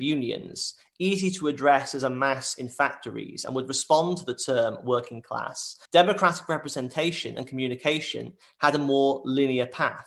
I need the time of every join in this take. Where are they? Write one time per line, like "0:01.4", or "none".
0:05.9